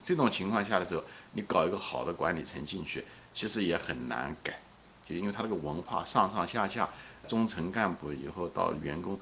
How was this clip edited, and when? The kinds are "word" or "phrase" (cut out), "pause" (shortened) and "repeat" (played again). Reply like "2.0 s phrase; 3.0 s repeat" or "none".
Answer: 7.2 s word